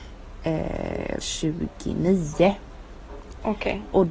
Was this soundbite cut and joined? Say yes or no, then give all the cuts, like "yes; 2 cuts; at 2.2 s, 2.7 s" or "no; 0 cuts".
yes; 1 cut; at 1.2 s